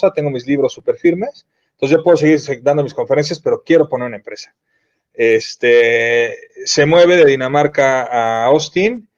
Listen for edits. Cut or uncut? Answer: uncut